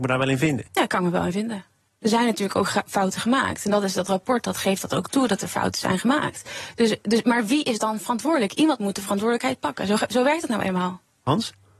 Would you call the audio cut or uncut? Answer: uncut